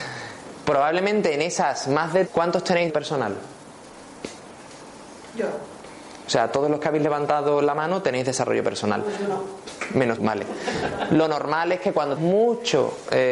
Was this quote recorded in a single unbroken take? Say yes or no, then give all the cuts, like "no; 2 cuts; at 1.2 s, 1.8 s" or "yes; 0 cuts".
no; 4 cuts; at 2.3 s, 2.9 s, 10.2 s, 12.2 s